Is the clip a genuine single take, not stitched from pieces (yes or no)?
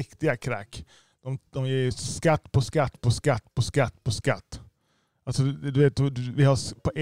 yes